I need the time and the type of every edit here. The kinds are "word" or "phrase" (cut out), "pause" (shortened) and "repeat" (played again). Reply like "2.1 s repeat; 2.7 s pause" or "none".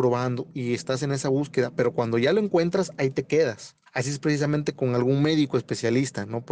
3.9 s pause